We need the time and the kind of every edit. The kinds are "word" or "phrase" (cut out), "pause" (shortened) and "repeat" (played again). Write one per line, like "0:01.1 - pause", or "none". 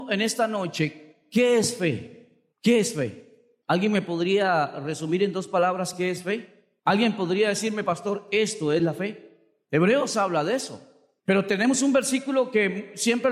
none